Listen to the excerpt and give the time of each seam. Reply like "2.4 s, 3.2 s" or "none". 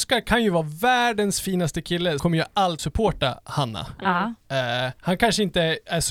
2.2 s, 2.8 s, 5.0 s